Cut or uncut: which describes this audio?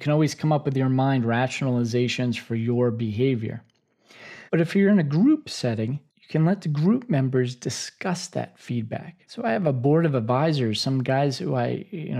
cut